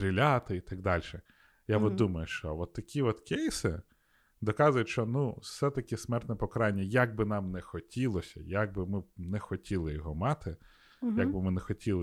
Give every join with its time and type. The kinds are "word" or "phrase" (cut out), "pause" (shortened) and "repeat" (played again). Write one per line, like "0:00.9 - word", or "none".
none